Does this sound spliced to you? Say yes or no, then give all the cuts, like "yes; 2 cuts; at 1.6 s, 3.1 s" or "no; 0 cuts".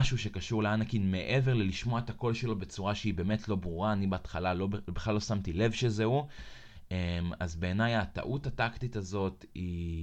no; 0 cuts